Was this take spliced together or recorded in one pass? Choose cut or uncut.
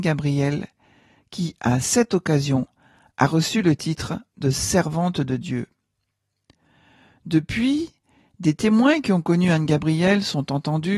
uncut